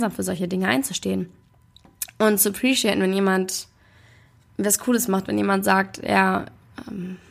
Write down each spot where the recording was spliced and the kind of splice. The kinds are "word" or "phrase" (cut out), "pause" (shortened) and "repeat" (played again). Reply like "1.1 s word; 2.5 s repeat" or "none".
none